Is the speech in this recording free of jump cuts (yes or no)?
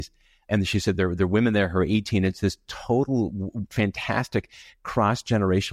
yes